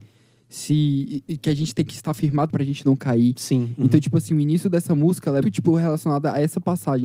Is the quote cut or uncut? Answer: cut